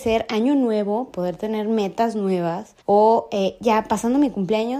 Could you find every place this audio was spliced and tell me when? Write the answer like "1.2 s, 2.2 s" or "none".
1.1 s, 2.8 s